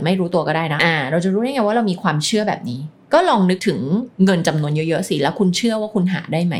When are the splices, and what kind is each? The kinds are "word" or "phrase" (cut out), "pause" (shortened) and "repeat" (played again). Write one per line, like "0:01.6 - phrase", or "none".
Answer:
0:04.1 - pause